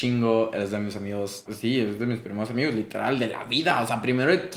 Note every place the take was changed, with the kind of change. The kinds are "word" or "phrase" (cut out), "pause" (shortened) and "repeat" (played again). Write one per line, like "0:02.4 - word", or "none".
0:01.5 - word